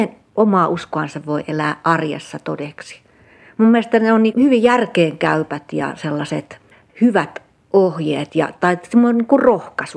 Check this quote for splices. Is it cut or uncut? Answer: cut